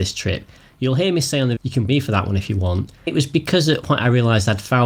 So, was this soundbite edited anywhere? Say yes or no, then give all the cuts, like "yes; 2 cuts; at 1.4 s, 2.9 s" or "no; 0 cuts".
yes; 4 cuts; at 1.6 s, 1.9 s, 3.1 s, 3.8 s